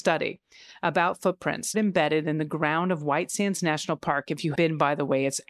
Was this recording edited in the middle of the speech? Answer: yes; 2 cuts; at 1.7 s, 4.5 s

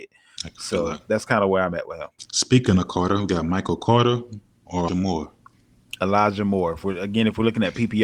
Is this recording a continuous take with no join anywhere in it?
no; 1 cut; at 4.9 s

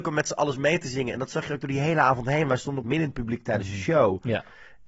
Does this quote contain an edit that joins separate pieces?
yes; 1 cut; at 2.8 s

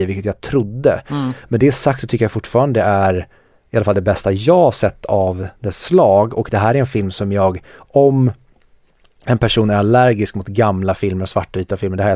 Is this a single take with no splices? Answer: yes; 0 cuts

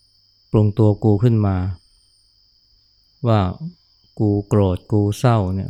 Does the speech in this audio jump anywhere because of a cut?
no; 0 cuts

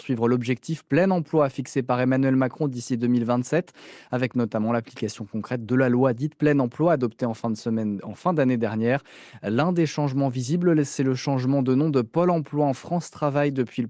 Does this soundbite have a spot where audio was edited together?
no; 0 cuts

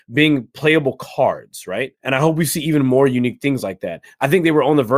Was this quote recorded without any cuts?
no; 1 cut; at 2.0 s

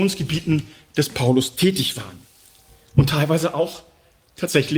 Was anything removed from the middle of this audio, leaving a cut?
no; 0 cuts

